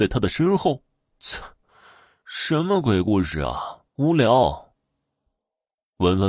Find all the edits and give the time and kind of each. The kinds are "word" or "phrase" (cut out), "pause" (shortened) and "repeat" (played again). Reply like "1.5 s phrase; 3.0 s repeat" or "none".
3.9 s pause